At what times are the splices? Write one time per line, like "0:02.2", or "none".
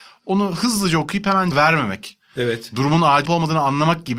0:01.5
0:03.2